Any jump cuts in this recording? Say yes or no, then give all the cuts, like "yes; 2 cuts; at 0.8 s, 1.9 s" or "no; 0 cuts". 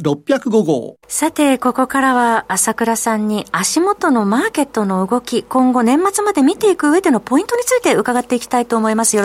yes; 1 cut; at 1.0 s